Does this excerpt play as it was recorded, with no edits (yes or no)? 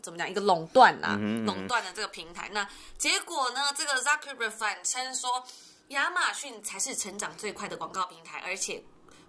yes